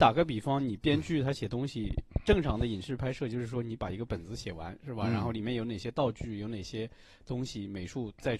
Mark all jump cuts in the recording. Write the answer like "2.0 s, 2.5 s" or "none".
none